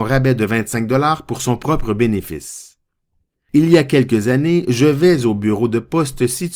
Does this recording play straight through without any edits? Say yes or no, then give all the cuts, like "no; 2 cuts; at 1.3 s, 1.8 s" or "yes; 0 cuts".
yes; 0 cuts